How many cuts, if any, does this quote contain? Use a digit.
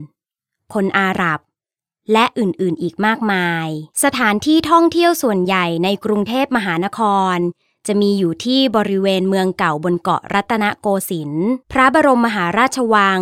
2